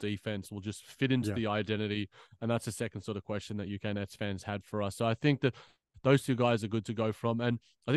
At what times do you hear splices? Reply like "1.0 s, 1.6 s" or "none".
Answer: none